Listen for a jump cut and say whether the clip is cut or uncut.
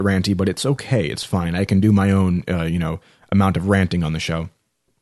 uncut